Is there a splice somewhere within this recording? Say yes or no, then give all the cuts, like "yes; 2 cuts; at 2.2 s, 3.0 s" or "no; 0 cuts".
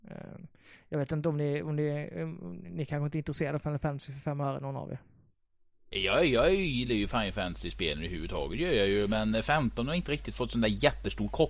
no; 0 cuts